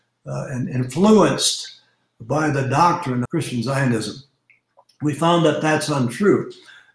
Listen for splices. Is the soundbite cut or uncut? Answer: cut